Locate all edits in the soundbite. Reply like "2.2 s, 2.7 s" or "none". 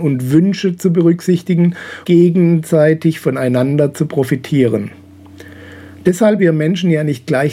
2.0 s, 6.4 s